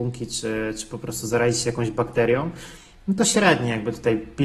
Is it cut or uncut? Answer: uncut